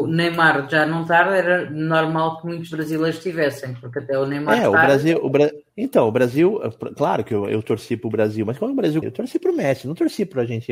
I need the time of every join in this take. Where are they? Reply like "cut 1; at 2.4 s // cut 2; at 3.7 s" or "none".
cut 1; at 5.7 s // cut 2; at 9.0 s

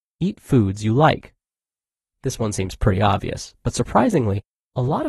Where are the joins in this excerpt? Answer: none

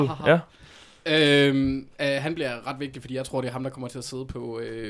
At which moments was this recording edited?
none

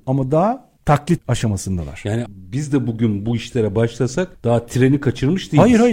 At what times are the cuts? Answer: cut 1; at 1.2 s // cut 2; at 2.3 s

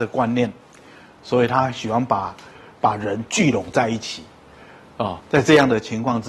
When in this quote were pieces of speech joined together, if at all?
cut 1; at 5.2 s

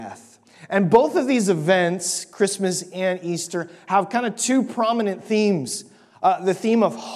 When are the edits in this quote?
none

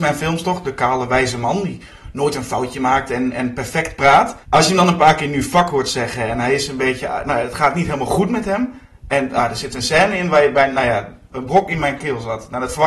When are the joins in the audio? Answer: cut 1; at 4.4 s

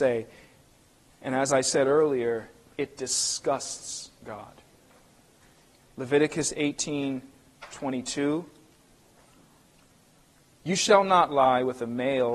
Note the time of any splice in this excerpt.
none

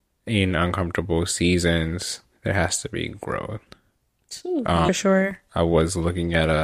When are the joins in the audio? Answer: cut 1; at 4.9 s

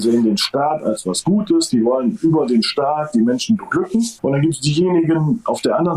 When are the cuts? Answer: cut 1; at 4.2 s

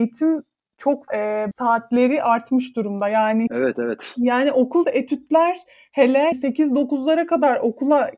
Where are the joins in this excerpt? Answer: cut 1; at 1.1 s // cut 2; at 1.5 s // cut 3; at 3.5 s // cut 4; at 4.8 s // cut 5; at 6.3 s

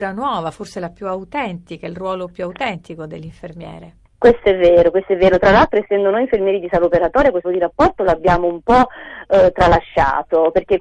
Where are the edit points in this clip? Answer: cut 1; at 7.4 s

